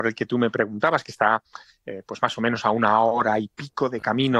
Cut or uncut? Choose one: uncut